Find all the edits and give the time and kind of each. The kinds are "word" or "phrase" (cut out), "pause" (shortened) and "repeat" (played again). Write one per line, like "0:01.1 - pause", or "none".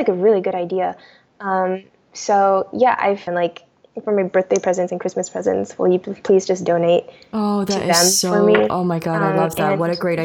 0:03.3 - phrase